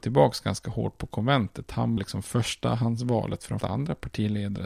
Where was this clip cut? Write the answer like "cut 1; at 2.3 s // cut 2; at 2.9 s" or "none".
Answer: cut 1; at 2.0 s // cut 2; at 3.6 s